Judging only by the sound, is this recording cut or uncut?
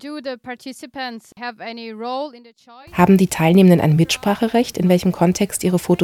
uncut